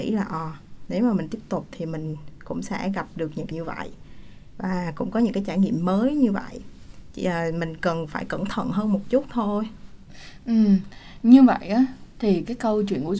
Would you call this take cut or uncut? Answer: cut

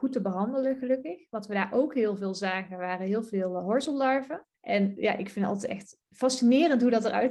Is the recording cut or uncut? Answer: cut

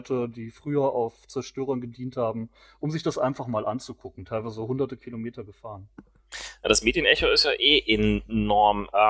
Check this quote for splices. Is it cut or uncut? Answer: uncut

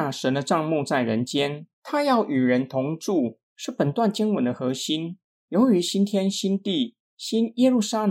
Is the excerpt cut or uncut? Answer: cut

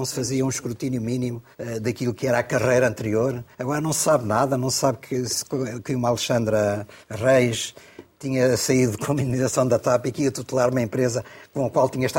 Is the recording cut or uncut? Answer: cut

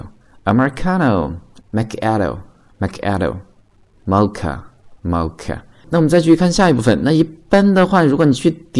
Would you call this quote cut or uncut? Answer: cut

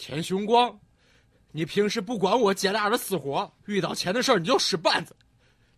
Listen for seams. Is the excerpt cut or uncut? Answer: cut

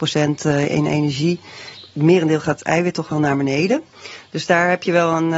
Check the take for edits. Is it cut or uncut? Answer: uncut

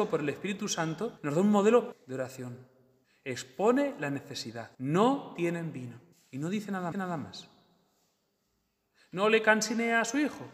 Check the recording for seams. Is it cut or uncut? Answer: cut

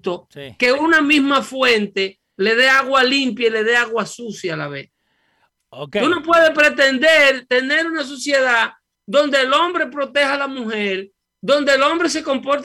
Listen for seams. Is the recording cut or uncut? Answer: uncut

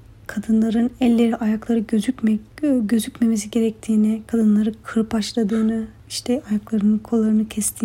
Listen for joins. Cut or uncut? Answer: uncut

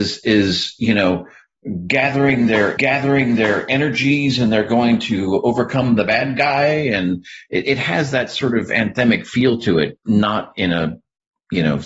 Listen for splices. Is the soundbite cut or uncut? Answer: cut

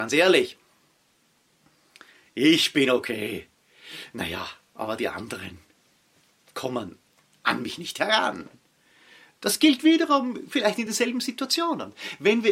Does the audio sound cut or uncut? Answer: uncut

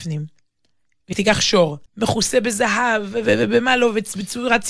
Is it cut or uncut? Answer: cut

